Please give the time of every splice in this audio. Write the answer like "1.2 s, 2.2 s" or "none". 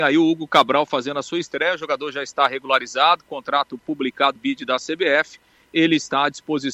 4.4 s